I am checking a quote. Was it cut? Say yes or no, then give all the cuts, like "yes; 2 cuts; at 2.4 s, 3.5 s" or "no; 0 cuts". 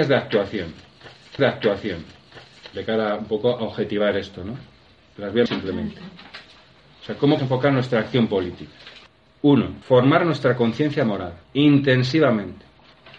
yes; 5 cuts; at 1.4 s, 5.5 s, 7.4 s, 9.8 s, 11.4 s